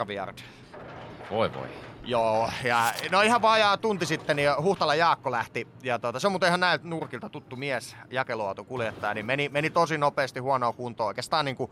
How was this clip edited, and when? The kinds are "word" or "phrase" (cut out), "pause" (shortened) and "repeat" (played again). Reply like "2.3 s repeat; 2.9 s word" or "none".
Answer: none